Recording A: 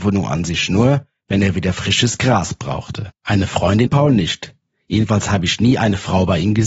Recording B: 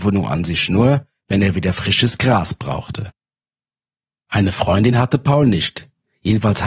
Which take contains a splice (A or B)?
A